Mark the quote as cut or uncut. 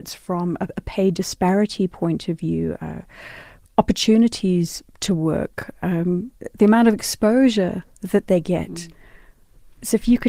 uncut